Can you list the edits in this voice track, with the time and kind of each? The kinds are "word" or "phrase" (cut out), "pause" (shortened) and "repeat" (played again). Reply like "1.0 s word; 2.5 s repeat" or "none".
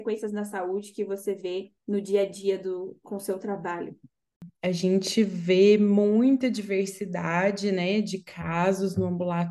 1.8 s pause